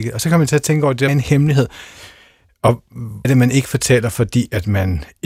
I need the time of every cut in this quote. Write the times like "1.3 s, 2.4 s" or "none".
1.1 s, 3.2 s